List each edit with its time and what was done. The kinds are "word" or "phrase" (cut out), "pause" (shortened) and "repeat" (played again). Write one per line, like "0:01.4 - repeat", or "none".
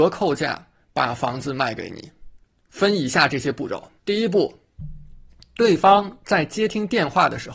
0:02.4 - pause
0:04.0 - pause
0:05.3 - pause

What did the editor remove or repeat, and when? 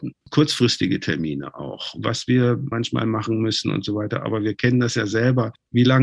0:02.7 - phrase

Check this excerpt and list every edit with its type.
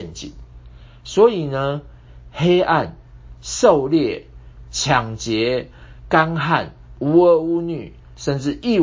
0:04.6 - phrase

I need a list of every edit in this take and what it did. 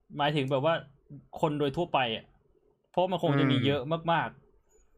none

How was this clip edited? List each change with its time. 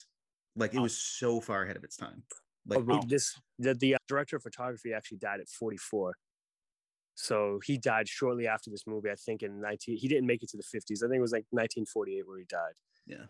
0:04.0 - word

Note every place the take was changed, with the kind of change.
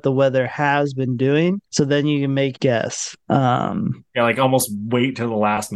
0:01.6 - pause
0:02.5 - phrase

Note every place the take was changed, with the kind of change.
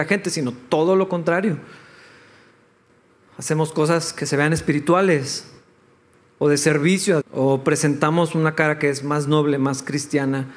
0:07.2 - word

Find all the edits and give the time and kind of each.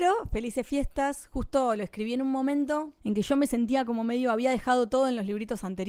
0:03.0 - pause

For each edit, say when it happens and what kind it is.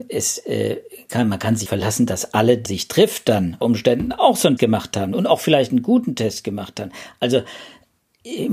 0:01.7 - phrase
0:02.7 - phrase
0:03.6 - word
0:04.6 - word

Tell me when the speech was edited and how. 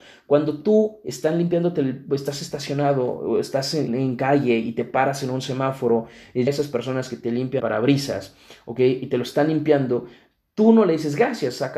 0:03.9 - word
0:06.5 - phrase
0:07.6 - word

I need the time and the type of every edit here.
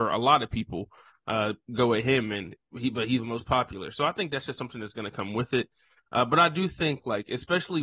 0:03.2 - word

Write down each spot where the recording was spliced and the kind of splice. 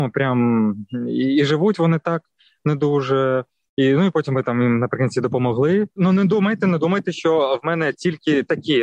none

